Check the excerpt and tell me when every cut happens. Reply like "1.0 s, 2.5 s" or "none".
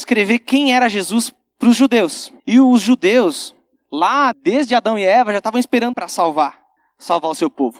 2.4 s, 4.3 s, 5.9 s

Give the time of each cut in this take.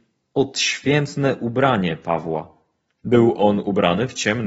none

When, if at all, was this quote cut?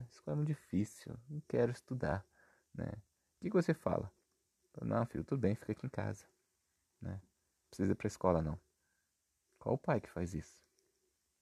none

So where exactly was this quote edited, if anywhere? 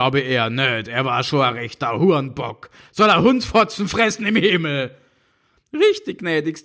none

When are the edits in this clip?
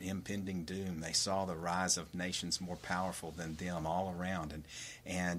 none

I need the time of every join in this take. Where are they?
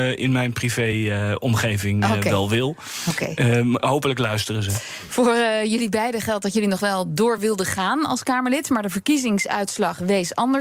none

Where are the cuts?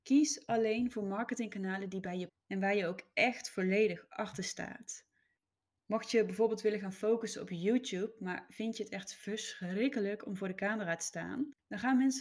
2.3 s

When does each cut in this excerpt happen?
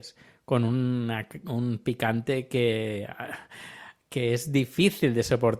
none

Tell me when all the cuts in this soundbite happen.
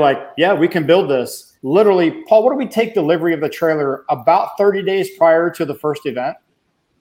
1.6 s

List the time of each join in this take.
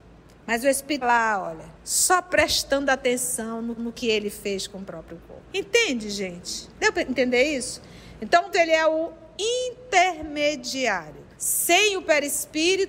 1.0 s, 1.7 s, 3.8 s, 5.5 s, 6.7 s, 8.5 s, 11.3 s

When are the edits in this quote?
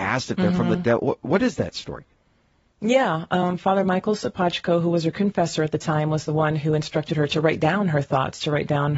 none

